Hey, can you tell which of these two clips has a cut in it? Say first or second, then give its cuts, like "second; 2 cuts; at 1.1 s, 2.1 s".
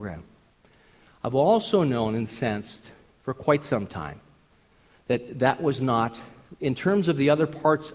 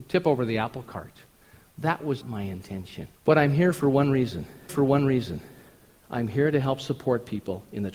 second; 3 cuts; at 2.2 s, 3.2 s, 4.7 s